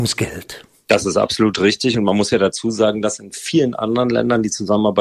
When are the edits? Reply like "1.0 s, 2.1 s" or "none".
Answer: none